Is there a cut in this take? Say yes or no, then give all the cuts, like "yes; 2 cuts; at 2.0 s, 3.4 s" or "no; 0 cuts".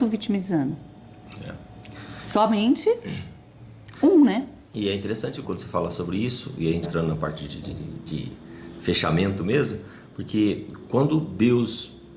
yes; 2 cuts; at 5.4 s, 6.8 s